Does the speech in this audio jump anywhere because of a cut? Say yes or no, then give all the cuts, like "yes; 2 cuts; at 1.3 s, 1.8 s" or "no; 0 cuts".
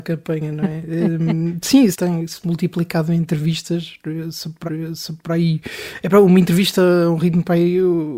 yes; 2 cuts; at 1.9 s, 4.7 s